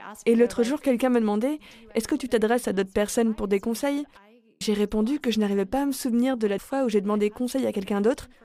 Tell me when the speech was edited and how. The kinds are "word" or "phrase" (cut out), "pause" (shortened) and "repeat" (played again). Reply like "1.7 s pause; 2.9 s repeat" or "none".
4.6 s word; 6.6 s word

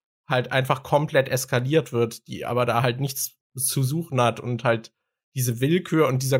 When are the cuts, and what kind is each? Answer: none

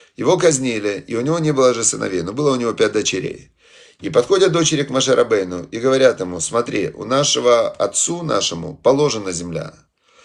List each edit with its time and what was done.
none

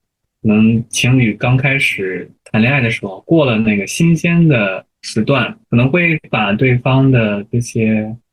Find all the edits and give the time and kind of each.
2.4 s pause; 4.9 s pause; 5.6 s pause

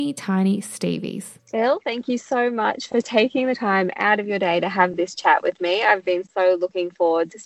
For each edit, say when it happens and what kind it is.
1.4 s pause

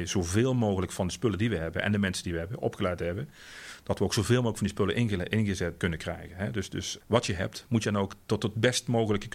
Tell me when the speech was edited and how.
5.8 s word; 7.0 s word

